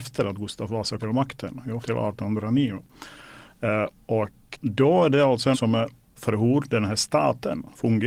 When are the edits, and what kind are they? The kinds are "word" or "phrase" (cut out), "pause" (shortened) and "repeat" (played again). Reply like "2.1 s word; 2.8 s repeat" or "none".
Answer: 1.0 s word; 1.8 s word; 4.5 s word; 5.5 s word; 6.2 s word